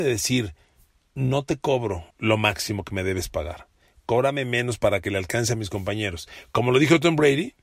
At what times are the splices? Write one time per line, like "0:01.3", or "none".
0:02.1